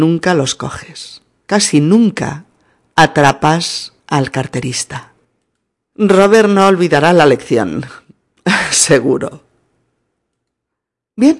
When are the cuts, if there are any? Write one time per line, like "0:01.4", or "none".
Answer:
0:04.0